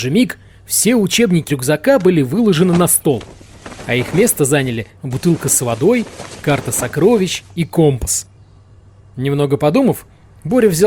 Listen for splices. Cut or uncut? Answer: cut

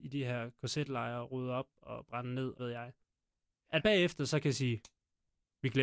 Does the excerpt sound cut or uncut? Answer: cut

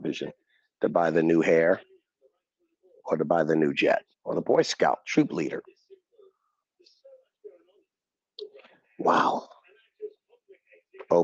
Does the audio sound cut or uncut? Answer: cut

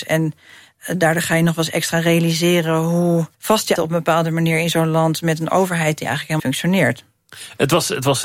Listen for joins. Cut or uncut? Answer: cut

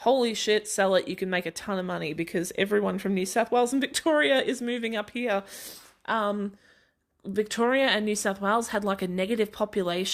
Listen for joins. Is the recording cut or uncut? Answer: uncut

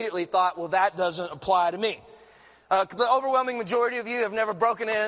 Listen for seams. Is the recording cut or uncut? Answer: cut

